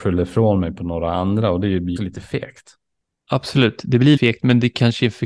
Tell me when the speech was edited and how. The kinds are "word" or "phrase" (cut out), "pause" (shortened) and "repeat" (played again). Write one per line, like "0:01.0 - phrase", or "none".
0:02.0 - word
0:04.2 - word